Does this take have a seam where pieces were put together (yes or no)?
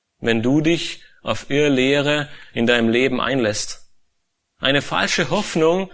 no